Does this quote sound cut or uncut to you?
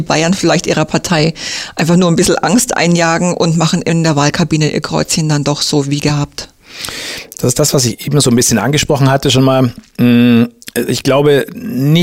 uncut